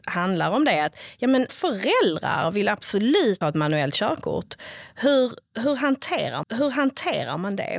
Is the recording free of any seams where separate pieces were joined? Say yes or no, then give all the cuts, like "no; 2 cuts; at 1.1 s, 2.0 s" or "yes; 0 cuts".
no; 3 cuts; at 1.5 s, 3.4 s, 6.4 s